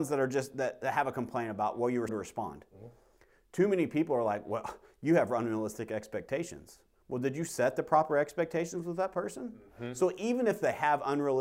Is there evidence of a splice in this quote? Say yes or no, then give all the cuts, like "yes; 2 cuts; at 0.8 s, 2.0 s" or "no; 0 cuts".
yes; 1 cut; at 2.1 s